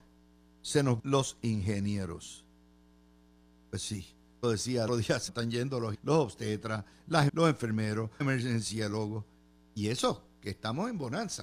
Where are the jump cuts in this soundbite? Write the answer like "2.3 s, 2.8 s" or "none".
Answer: 1.0 s, 4.4 s, 4.9 s, 5.3 s, 5.9 s, 7.3 s, 8.2 s